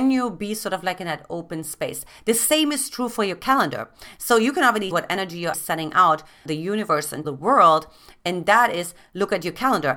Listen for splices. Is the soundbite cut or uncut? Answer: cut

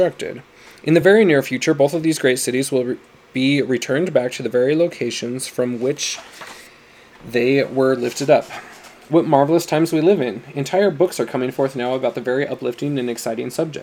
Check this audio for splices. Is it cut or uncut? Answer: uncut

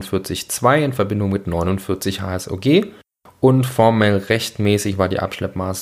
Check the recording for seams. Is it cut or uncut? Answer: uncut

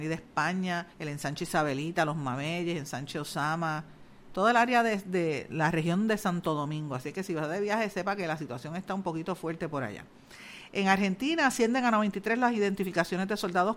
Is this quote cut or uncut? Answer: cut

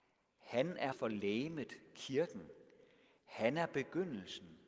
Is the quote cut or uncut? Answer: cut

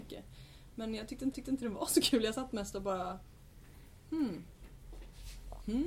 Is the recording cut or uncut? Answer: cut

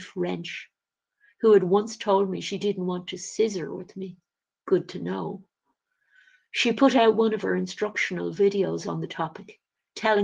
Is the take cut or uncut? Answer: uncut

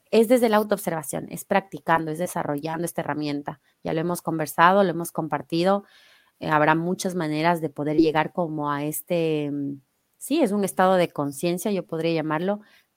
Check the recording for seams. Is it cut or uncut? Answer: uncut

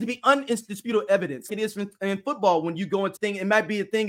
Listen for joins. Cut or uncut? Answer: cut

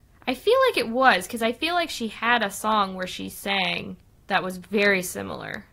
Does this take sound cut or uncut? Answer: uncut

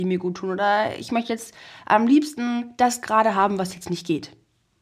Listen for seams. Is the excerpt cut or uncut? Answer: uncut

